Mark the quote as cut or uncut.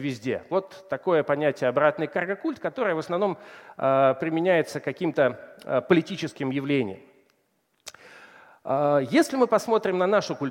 uncut